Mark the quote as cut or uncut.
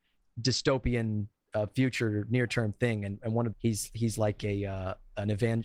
cut